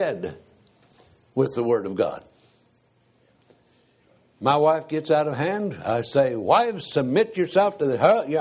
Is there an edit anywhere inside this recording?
no; 0 cuts

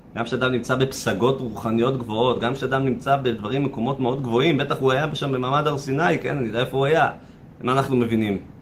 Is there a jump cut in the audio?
no; 0 cuts

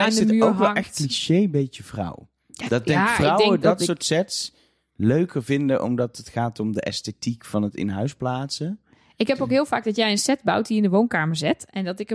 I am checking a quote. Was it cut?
no; 0 cuts

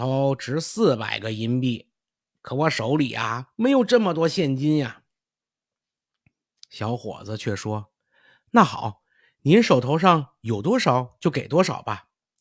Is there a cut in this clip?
no; 0 cuts

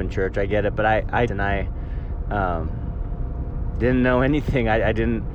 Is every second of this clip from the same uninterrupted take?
no; 1 cut; at 1.3 s

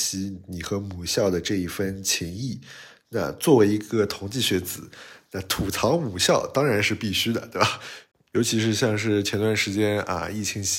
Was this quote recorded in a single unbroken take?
yes; 0 cuts

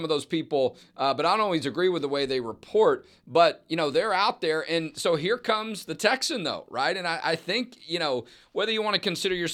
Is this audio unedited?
yes; 0 cuts

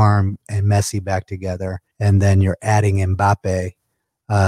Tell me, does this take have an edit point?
yes; 1 cut; at 1.9 s

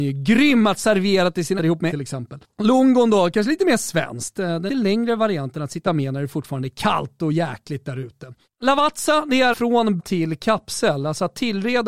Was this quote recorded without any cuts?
no; 6 cuts; at 1.6 s, 1.9 s, 4.7 s, 5.9 s, 9.5 s, 10.0 s

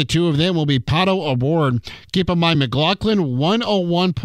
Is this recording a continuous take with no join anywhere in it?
yes; 0 cuts

